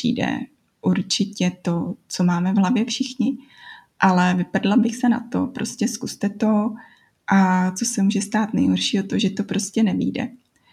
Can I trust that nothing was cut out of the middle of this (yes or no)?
yes